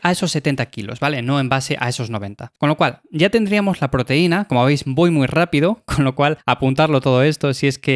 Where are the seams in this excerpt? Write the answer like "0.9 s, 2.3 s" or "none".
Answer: 2.6 s, 6.4 s